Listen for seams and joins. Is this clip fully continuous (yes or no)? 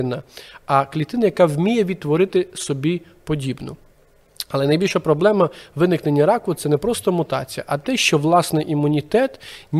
yes